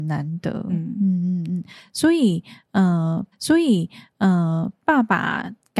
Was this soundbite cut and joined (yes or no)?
yes